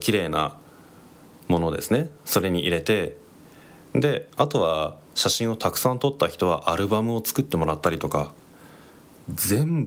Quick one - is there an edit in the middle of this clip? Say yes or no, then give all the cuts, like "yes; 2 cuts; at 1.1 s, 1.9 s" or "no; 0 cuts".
no; 0 cuts